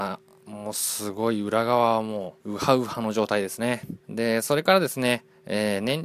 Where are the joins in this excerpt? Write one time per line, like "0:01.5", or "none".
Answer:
0:02.4
0:04.0